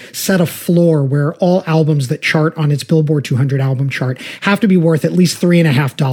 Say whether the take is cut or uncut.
uncut